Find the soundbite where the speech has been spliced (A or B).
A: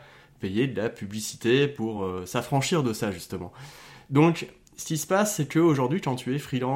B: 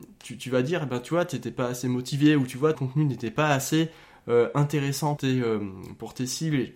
B